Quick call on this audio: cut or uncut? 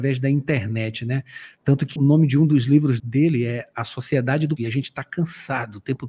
cut